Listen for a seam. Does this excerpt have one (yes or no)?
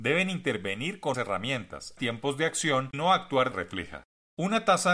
yes